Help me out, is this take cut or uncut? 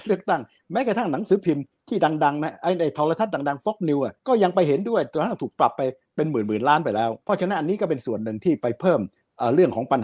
cut